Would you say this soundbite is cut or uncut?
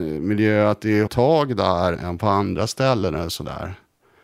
cut